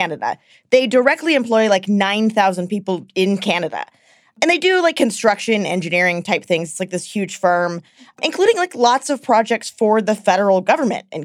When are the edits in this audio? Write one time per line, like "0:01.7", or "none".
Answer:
none